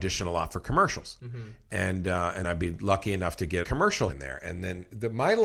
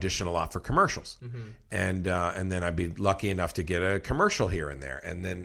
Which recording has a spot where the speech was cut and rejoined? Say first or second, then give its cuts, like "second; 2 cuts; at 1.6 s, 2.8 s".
first; 3 cuts; at 2.4 s, 3.6 s, 4.1 s